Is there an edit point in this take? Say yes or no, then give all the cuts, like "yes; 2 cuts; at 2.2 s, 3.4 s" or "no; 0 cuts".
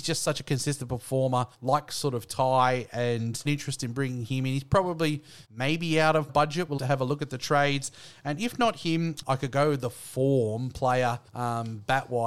yes; 7 cuts; at 1.5 s, 3.5 s, 5.4 s, 6.3 s, 6.8 s, 9.2 s, 11.3 s